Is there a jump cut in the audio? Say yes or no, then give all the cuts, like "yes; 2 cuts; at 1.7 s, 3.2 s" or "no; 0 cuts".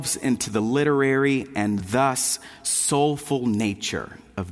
no; 0 cuts